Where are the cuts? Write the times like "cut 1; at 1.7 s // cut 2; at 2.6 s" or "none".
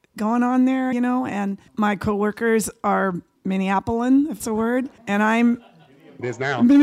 cut 1; at 0.9 s // cut 2; at 1.7 s // cut 3; at 3.4 s // cut 4; at 4.4 s // cut 5; at 5.0 s